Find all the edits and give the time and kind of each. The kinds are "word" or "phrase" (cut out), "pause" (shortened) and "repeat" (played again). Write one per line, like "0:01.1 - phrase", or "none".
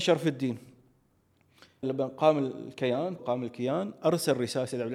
0:01.8 - word
0:03.2 - word